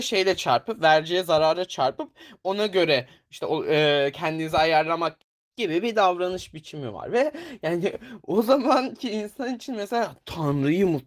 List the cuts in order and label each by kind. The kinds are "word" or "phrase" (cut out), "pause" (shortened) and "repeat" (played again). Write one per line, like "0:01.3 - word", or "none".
none

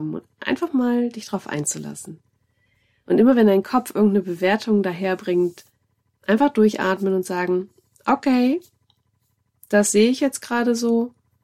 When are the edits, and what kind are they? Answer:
none

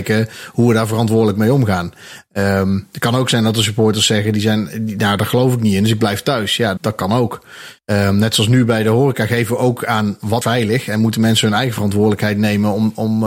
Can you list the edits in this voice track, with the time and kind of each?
0:06.8 - word
0:07.8 - pause
0:10.4 - word

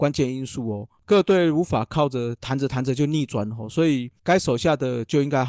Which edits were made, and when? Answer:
0:04.2 - pause

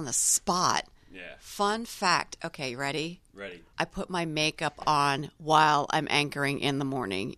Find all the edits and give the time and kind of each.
0:03.7 - pause
0:05.4 - pause

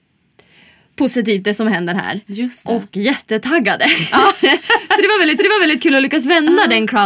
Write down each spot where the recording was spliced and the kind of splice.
0:02.9 - phrase
0:05.4 - repeat

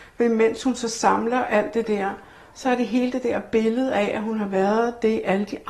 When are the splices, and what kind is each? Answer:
none

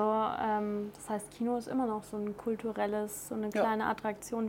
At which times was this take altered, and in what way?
none

